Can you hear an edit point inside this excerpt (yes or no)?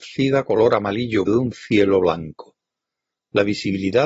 yes